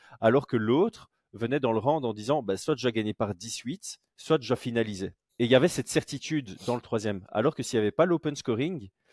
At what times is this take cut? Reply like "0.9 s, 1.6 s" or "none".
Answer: 4.1 s, 5.3 s